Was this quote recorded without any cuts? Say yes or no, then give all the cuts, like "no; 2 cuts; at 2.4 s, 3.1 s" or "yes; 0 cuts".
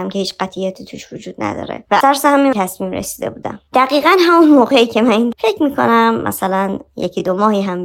no; 3 cuts; at 2.0 s, 2.5 s, 5.3 s